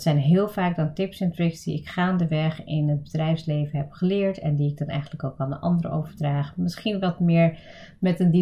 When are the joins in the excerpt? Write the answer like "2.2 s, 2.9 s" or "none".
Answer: none